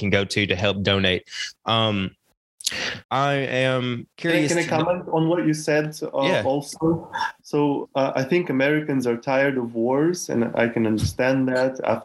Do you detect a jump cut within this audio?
yes; 4 cuts; at 1.6 s, 3.0 s, 4.1 s, 7.9 s

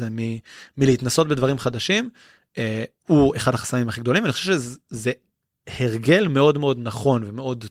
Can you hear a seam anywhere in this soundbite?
no; 0 cuts

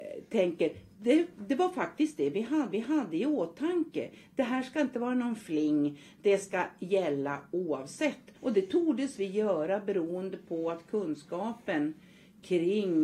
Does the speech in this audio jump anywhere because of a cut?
yes; 2 cuts; at 2.7 s, 8.3 s

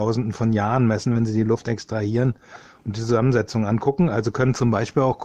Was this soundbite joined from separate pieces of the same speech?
no; 0 cuts

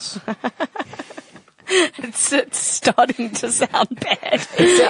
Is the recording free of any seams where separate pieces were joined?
yes; 0 cuts

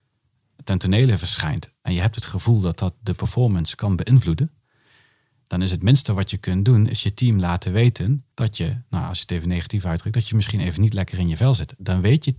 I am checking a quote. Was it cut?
yes; 1 cut; at 8.3 s

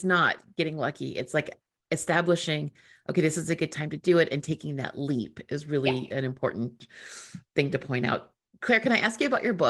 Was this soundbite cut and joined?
no; 0 cuts

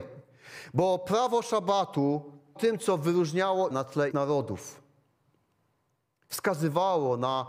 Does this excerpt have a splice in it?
yes; 3 cuts; at 2.6 s, 3.7 s, 4.1 s

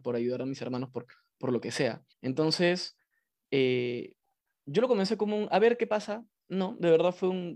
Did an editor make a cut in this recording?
yes; 1 cut; at 2.1 s

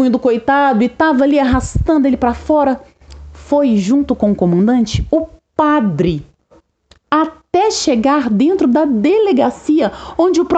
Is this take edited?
no; 0 cuts

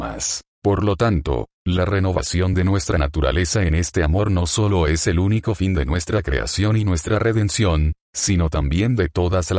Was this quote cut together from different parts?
no; 0 cuts

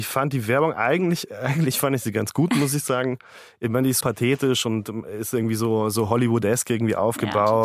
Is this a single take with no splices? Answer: no; 1 cut; at 4.0 s

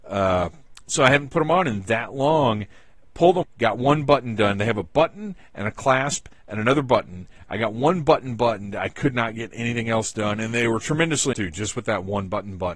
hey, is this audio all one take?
no; 2 cuts; at 3.4 s, 11.3 s

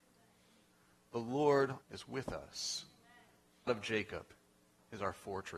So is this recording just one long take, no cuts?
no; 2 cuts; at 1.8 s, 3.7 s

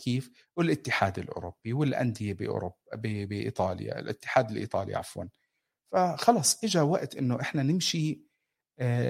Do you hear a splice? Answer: no; 0 cuts

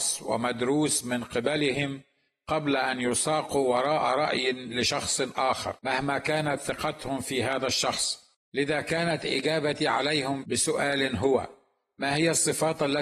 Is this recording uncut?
no; 2 cuts; at 5.8 s, 8.4 s

